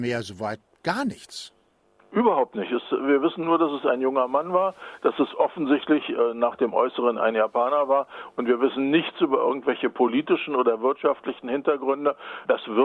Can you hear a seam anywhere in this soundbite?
no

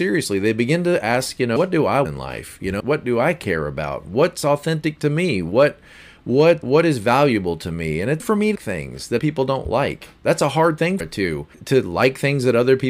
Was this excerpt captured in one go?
no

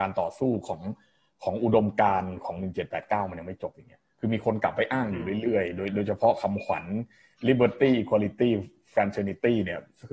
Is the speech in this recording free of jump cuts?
yes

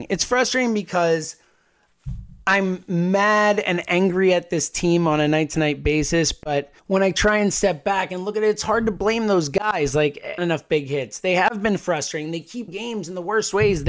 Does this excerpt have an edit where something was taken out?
yes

